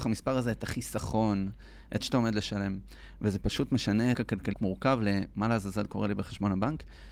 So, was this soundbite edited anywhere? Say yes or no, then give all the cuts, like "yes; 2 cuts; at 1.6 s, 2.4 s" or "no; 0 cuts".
yes; 3 cuts; at 2.0 s, 4.1 s, 4.5 s